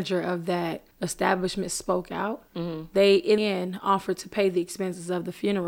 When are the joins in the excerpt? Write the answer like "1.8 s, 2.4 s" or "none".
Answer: 0.9 s, 2.5 s, 3.4 s